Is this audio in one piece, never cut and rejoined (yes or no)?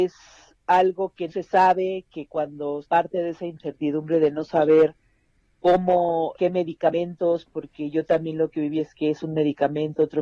no